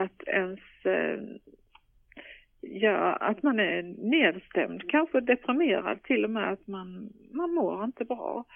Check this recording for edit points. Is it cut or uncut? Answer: uncut